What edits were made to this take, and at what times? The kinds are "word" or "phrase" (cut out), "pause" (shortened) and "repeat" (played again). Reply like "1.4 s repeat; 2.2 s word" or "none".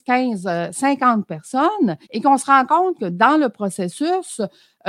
2.0 s pause